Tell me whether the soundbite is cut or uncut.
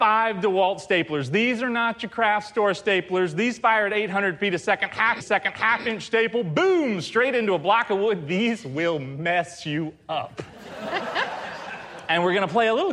cut